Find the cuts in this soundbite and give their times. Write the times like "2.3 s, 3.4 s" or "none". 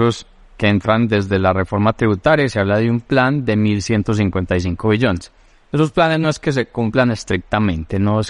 none